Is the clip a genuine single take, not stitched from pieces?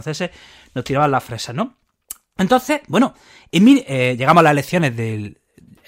yes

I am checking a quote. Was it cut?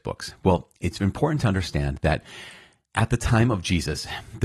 no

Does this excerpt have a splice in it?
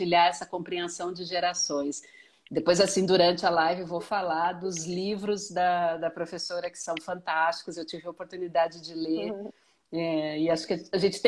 no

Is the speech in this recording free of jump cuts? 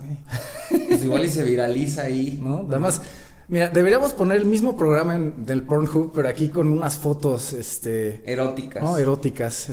yes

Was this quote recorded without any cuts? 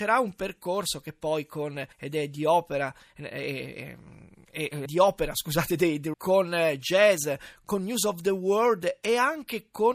no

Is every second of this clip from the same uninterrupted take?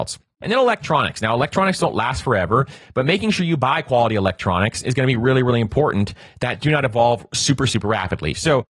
yes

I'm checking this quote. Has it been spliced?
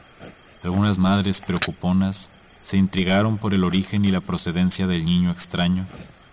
no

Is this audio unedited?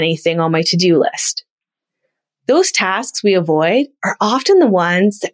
yes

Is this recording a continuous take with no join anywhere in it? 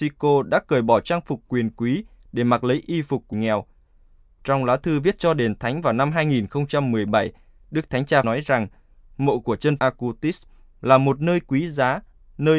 no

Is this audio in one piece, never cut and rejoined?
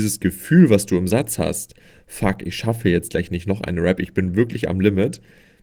yes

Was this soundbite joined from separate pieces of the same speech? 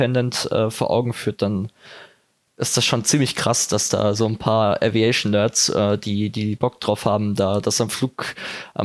no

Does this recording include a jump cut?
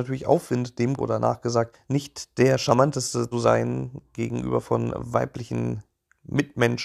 yes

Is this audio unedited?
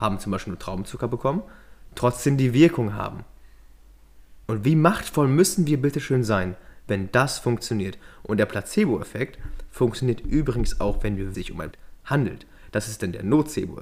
no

